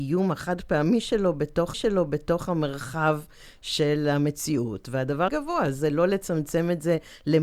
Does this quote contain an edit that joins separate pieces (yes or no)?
yes